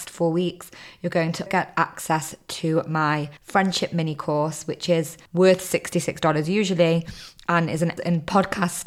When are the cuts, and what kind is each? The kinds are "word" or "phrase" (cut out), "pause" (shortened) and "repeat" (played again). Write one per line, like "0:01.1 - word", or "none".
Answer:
0:01.5 - word
0:03.4 - pause
0:05.3 - pause
0:08.0 - phrase

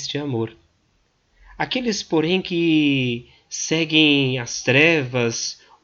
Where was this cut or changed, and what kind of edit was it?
none

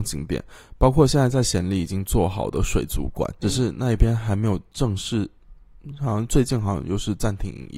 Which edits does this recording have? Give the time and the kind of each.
0:03.4 - word

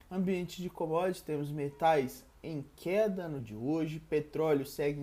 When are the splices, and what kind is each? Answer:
0:03.4 - word

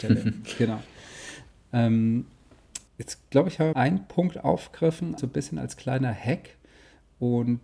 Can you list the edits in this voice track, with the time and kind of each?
0:02.9 - pause
0:03.7 - phrase
0:05.2 - word

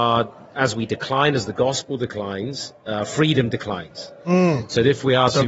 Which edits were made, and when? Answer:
none

